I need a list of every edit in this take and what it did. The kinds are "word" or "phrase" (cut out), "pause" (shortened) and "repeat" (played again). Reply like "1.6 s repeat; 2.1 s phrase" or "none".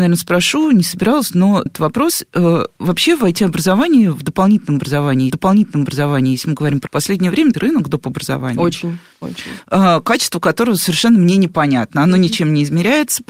1.7 s word; 5.3 s repeat; 6.9 s word; 7.5 s phrase